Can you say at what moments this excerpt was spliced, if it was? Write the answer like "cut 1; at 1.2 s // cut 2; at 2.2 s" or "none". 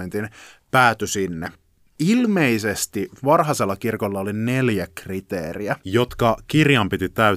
none